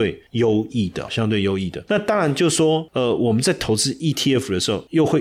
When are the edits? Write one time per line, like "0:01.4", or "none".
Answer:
0:01.1